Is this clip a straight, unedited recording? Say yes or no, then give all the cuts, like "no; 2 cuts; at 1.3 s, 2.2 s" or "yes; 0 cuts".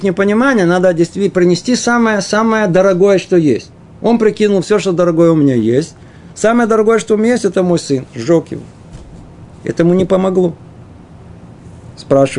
yes; 0 cuts